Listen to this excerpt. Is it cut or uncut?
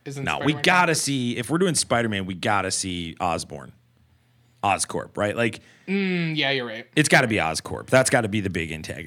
uncut